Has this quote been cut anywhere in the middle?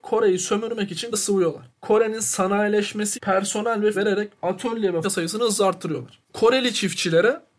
yes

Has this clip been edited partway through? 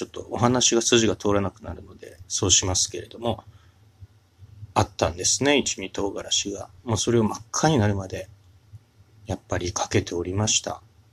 no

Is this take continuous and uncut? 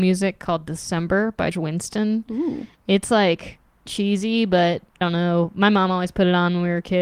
no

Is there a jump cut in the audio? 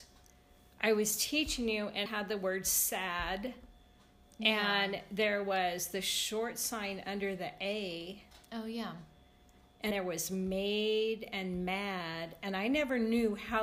yes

